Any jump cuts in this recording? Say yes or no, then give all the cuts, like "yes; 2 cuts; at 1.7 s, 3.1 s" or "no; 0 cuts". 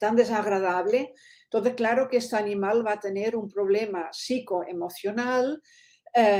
no; 0 cuts